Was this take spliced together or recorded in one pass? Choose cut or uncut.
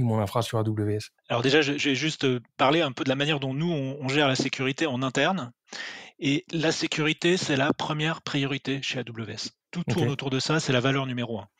cut